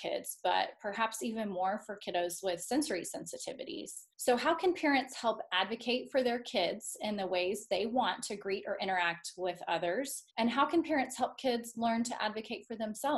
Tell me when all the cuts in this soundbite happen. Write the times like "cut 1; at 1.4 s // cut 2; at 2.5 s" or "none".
cut 1; at 4.1 s // cut 2; at 10.3 s